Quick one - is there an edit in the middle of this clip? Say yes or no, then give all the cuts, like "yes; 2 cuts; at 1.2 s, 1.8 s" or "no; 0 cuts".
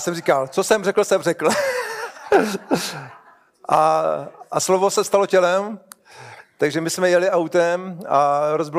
no; 0 cuts